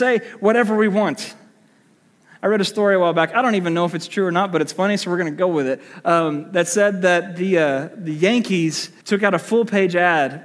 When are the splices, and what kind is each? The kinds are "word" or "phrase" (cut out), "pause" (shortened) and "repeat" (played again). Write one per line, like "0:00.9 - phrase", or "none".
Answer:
0:09.0 - pause